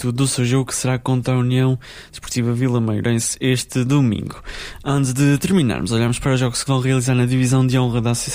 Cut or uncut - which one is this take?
cut